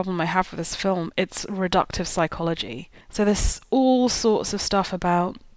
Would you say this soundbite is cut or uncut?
cut